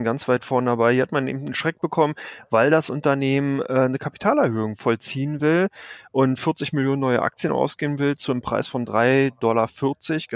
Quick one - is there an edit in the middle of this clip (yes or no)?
no